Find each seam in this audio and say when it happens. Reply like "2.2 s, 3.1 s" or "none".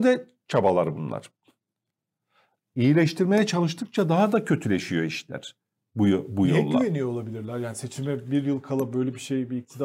none